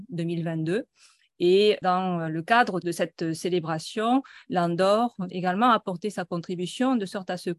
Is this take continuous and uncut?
no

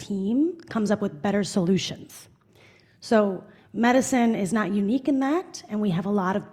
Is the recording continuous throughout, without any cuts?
yes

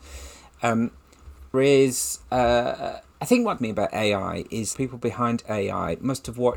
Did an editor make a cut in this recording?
yes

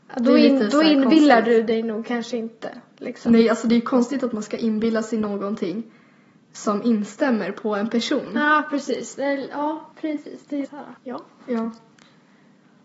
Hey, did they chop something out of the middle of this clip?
yes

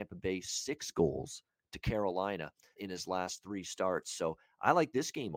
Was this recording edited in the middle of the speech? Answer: yes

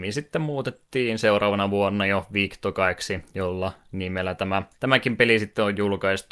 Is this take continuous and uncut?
no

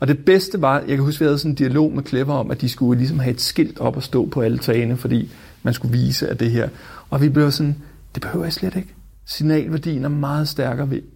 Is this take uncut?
yes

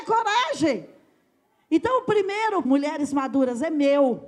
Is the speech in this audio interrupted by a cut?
yes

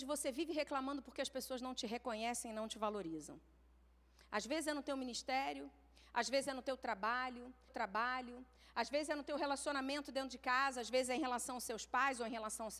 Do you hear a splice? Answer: yes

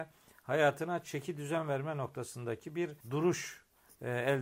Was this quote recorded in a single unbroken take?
no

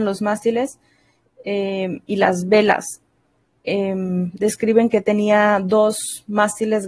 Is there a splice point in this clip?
no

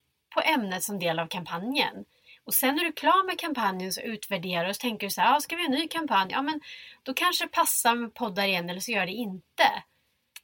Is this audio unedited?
yes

